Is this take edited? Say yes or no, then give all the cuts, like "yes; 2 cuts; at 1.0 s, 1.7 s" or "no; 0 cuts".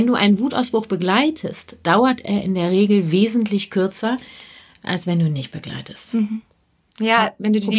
no; 0 cuts